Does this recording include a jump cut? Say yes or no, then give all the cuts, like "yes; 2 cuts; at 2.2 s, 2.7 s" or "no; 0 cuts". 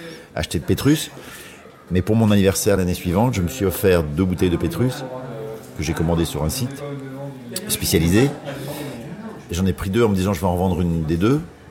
no; 0 cuts